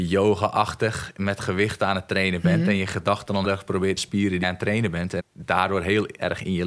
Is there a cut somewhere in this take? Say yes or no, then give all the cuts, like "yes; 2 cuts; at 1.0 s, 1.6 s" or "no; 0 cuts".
yes; 4 cuts; at 3.4 s, 4.0 s, 4.4 s, 5.2 s